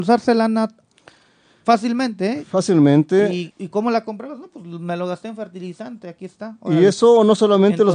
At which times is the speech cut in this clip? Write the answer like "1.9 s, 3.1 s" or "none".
3.5 s

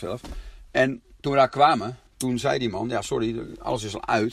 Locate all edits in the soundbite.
1.2 s

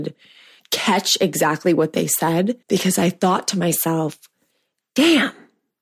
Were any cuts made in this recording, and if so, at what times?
2.6 s

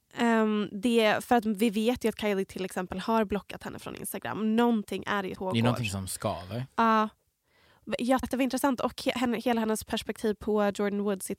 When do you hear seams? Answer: 5.3 s, 8.2 s

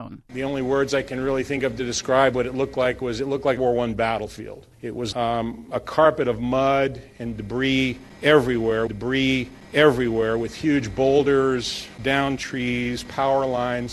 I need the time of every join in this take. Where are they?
3.6 s, 4.7 s, 5.1 s, 8.9 s, 12.0 s

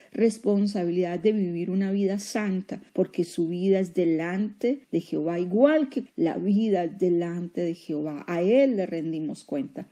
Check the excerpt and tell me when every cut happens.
2.9 s, 4.8 s, 6.1 s

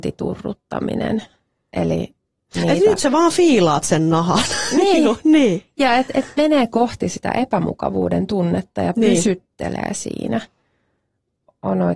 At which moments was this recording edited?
none

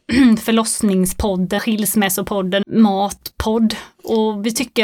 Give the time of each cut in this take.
1.6 s, 2.6 s

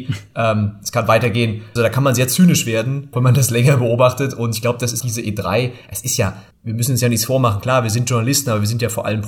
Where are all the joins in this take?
1.8 s, 3.1 s, 5.0 s, 6.5 s

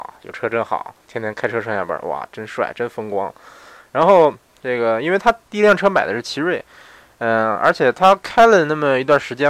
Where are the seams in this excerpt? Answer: none

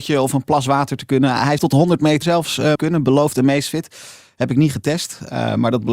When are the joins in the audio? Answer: 1.6 s, 2.2 s, 2.8 s

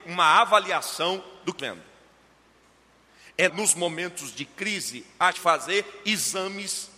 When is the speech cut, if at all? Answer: 1.6 s, 3.5 s, 5.3 s

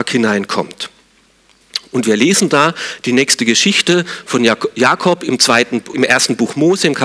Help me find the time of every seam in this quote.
5.9 s

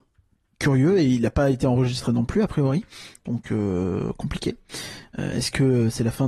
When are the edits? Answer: none

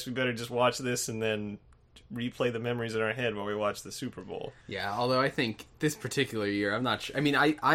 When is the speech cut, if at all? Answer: 4.6 s

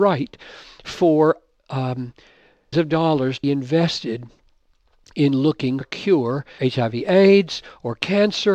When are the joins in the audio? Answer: 2.7 s, 3.4 s, 5.8 s, 6.6 s

